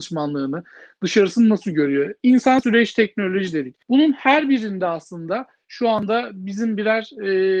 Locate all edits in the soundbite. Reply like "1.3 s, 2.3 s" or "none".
3.8 s